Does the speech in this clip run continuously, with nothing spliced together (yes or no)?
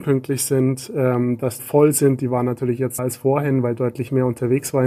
no